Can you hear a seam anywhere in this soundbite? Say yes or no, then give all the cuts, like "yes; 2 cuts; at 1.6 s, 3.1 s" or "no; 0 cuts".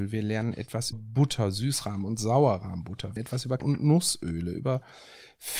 yes; 3 cuts; at 0.9 s, 3.2 s, 3.6 s